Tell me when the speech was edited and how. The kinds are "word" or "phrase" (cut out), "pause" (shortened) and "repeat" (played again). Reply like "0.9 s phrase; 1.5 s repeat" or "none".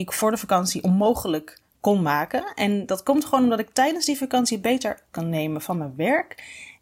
5.1 s word